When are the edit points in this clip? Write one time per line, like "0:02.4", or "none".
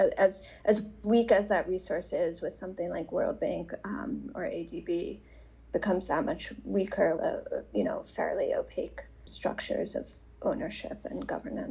0:07.2